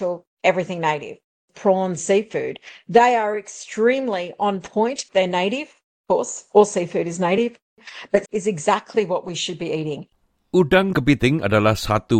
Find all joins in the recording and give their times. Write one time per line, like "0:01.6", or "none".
0:02.0
0:05.1
0:08.3
0:10.9